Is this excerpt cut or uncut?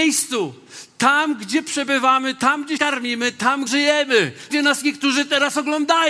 cut